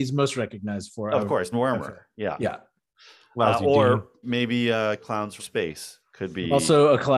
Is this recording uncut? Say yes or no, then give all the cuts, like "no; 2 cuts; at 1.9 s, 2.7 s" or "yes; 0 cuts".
no; 4 cuts; at 1.5 s, 4.2 s, 5.0 s, 5.4 s